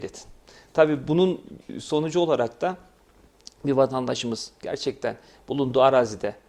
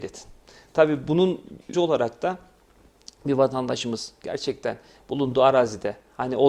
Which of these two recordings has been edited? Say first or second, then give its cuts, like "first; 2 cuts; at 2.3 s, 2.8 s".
second; 1 cut; at 1.7 s